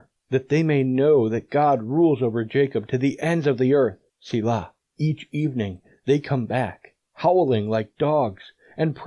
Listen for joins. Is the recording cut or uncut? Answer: uncut